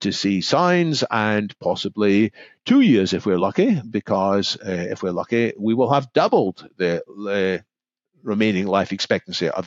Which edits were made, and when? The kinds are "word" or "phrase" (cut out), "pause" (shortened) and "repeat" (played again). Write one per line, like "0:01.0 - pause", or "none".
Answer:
none